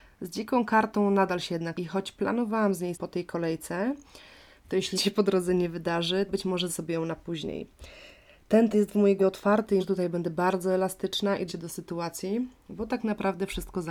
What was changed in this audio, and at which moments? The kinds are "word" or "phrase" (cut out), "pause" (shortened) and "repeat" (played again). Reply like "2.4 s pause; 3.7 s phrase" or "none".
1.7 s word; 2.9 s word; 4.9 s word; 6.3 s word; 6.7 s word; 8.7 s word; 9.2 s word; 9.8 s word; 11.5 s word